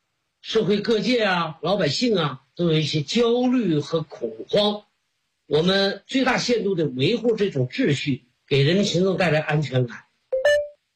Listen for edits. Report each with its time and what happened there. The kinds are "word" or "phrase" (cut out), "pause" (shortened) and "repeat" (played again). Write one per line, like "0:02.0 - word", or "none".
0:02.5 - pause
0:08.3 - pause